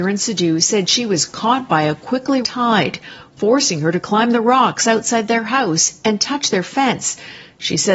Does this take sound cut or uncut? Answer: cut